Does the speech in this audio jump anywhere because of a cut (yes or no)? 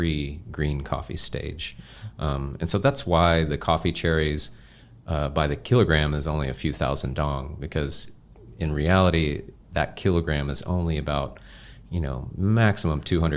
no